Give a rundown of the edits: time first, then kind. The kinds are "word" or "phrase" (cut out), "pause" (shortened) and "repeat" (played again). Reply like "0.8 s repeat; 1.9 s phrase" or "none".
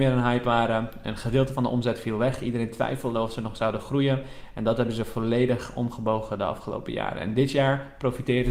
none